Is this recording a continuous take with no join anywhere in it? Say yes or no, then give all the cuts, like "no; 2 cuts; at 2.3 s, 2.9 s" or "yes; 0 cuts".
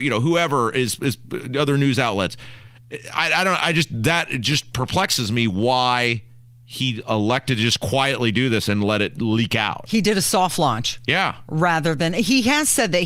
yes; 0 cuts